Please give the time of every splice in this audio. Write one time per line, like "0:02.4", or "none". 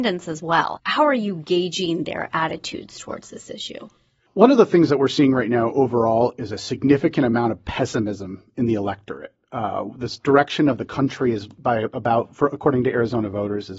none